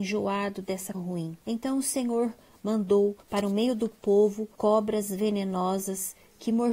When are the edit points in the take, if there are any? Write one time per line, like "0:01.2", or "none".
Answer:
0:00.9
0:01.4
0:03.2
0:04.5